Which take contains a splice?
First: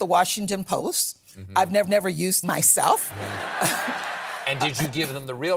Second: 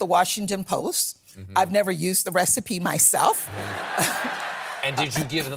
first; 2 cuts; at 1.8 s, 2.4 s

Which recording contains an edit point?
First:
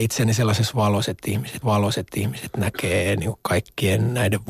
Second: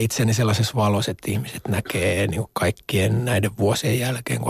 first; 1 cut; at 1.6 s

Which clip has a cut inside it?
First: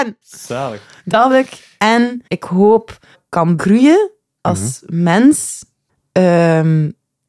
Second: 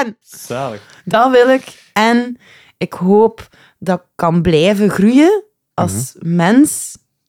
first; 5 cuts; at 1.3 s, 2.3 s, 3.1 s, 3.6 s, 5.9 s

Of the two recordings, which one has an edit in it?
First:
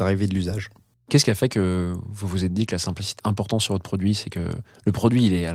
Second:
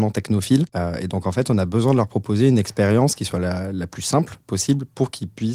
first; 1 cut; at 3.2 s

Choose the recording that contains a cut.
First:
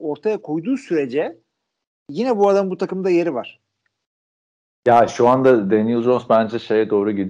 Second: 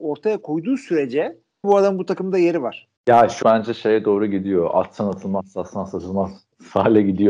second; 3 cuts; at 1.6 s, 3.0 s, 3.4 s

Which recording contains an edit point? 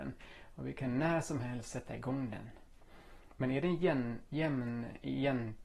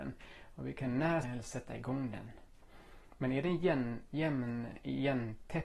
second; 1 cut; at 1.2 s

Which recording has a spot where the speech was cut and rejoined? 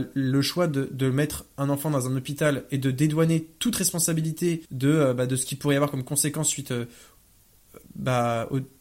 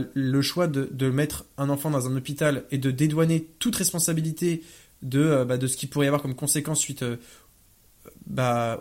first; 1 cut; at 4.7 s

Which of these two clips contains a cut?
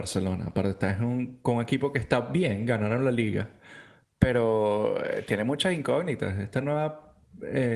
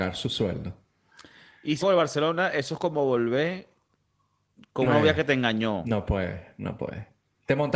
second; 2 cuts; at 1.8 s, 4.8 s

